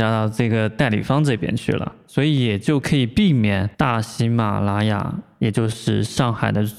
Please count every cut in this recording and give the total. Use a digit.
1